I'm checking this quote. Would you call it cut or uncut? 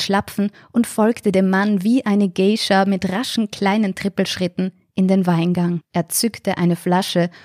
cut